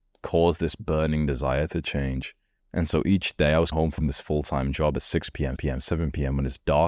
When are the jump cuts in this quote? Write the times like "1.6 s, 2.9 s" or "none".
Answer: 2.6 s, 3.7 s, 5.6 s